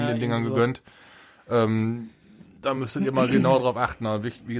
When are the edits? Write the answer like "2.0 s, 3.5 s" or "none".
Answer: none